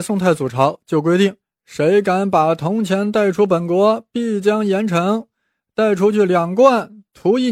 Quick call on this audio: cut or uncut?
cut